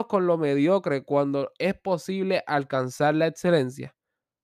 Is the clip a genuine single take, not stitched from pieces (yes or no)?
yes